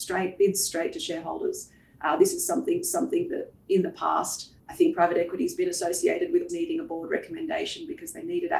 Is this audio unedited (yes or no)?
no